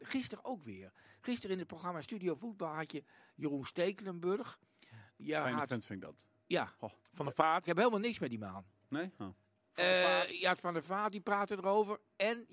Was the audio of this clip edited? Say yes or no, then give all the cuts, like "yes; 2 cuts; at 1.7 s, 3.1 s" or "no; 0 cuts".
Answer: no; 0 cuts